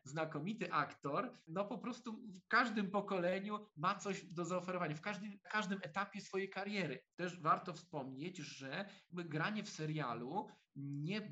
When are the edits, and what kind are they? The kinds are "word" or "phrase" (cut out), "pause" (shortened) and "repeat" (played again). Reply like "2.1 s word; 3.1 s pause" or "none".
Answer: 2.5 s word; 5.4 s word